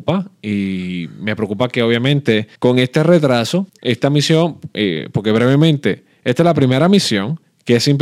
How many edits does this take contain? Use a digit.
2